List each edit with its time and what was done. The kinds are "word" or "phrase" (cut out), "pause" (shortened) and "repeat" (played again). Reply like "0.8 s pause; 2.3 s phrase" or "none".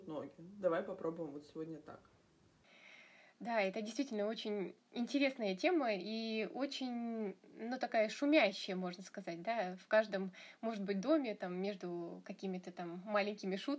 none